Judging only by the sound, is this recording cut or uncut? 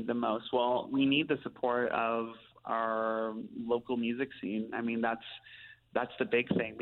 uncut